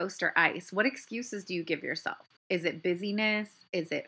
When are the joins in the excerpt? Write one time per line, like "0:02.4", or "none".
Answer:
0:02.4